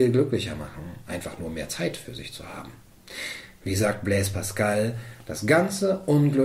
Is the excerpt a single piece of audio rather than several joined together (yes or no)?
yes